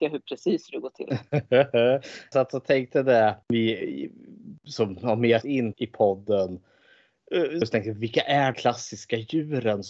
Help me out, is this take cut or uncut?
cut